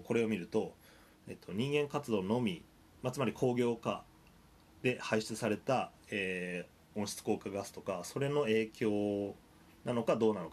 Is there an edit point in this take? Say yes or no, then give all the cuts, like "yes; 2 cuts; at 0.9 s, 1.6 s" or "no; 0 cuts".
no; 0 cuts